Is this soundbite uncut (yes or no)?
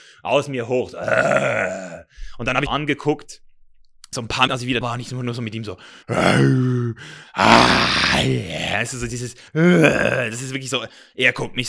no